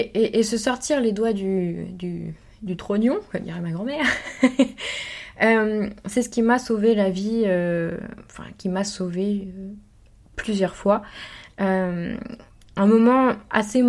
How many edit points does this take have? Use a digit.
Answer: 0